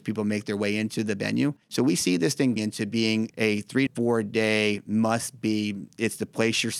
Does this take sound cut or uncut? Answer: cut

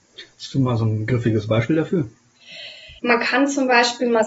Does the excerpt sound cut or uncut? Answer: cut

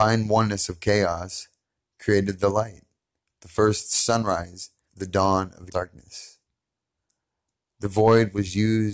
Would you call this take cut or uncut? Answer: cut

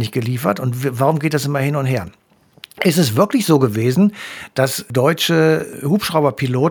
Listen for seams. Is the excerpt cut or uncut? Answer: uncut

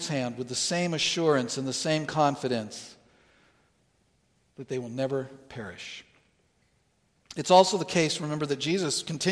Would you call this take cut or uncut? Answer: uncut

